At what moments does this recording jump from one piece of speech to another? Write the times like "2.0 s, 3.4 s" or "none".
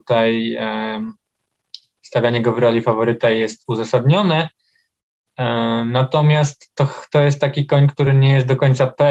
none